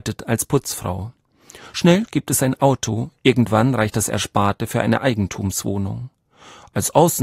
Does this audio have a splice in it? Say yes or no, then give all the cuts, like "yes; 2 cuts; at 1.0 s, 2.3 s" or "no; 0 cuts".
no; 0 cuts